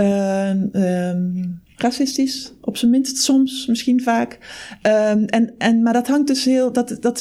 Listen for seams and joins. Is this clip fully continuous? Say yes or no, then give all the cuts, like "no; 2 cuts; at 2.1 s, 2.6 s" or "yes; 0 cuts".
yes; 0 cuts